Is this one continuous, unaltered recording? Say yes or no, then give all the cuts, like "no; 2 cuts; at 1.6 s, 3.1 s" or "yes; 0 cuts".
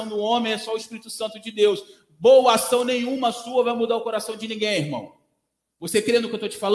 yes; 0 cuts